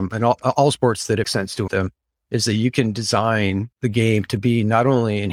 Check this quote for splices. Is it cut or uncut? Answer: cut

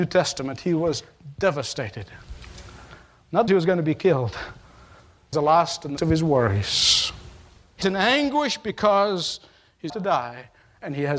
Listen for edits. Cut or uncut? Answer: cut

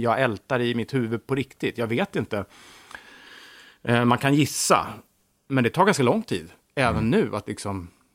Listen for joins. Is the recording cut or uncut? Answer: uncut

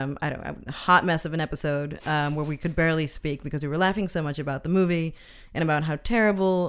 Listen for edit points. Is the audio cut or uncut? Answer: uncut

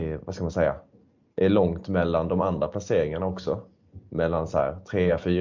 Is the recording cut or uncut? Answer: uncut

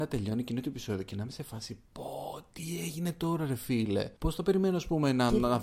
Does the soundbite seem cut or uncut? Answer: cut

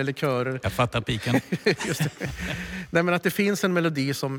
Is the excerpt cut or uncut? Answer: uncut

